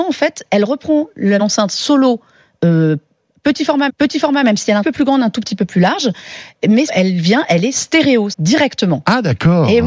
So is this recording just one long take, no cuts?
no; 5 cuts; at 1.4 s, 3.9 s, 4.8 s, 6.9 s, 8.3 s

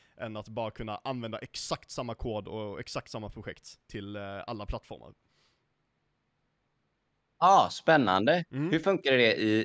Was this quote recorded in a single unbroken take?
yes; 0 cuts

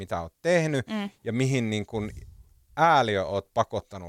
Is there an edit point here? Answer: no; 0 cuts

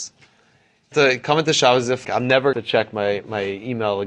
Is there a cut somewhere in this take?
yes; 3 cuts; at 0.9 s, 2.0 s, 2.5 s

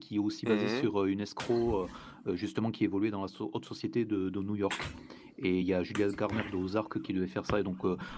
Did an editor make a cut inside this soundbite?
no; 0 cuts

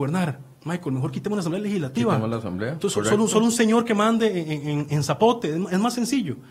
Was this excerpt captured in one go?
yes; 0 cuts

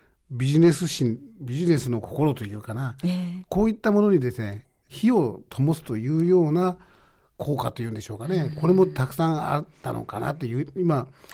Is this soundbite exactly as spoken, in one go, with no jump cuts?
yes; 0 cuts

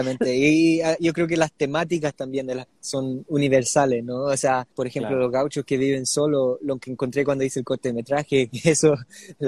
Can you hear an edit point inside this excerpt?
yes; 2 cuts; at 2.7 s, 4.7 s

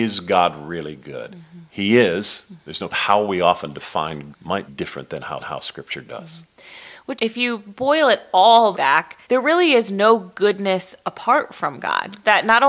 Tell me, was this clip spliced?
yes; 7 cuts; at 2.9 s, 4.3 s, 4.7 s, 5.4 s, 7.2 s, 8.7 s, 9.2 s

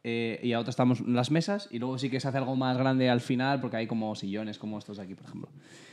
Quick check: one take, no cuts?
yes; 0 cuts

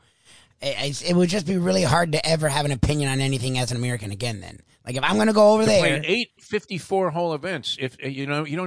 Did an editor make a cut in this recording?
yes; 1 cut; at 6.4 s

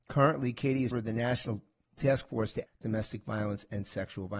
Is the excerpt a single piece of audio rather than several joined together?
no; 3 cuts; at 0.9 s, 2.0 s, 2.7 s

